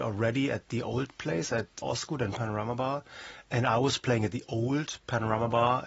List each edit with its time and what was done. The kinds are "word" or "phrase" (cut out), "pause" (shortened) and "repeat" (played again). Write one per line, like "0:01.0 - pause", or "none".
0:01.8 - word